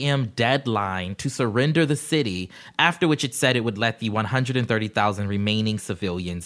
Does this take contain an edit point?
no; 0 cuts

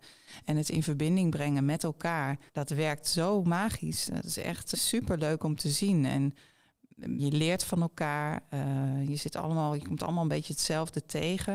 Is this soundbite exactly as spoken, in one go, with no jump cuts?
no; 3 cuts; at 2.5 s, 4.7 s, 7.2 s

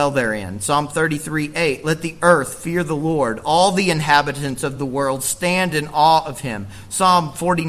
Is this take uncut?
yes; 0 cuts

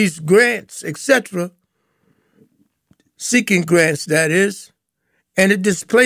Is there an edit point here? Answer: no; 0 cuts

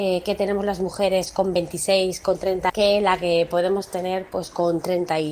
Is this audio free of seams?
no; 1 cut; at 2.7 s

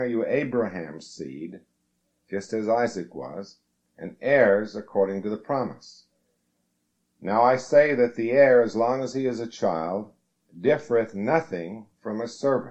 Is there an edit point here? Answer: no; 0 cuts

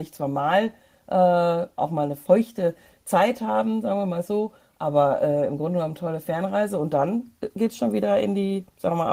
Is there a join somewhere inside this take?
no; 0 cuts

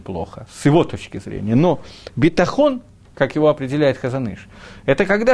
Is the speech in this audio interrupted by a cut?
no; 0 cuts

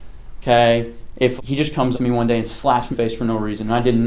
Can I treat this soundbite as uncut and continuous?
no; 3 cuts; at 1.4 s, 1.9 s, 2.9 s

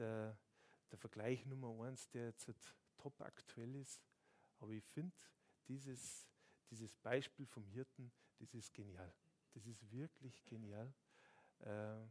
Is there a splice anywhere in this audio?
no; 0 cuts

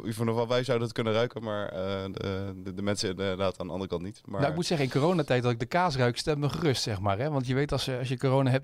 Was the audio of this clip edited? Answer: no; 0 cuts

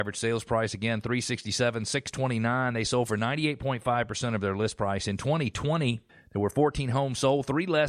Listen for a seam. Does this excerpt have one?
yes; 1 cut; at 6.1 s

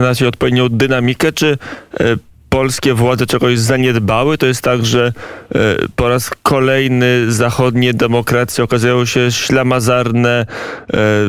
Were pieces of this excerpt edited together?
no; 0 cuts

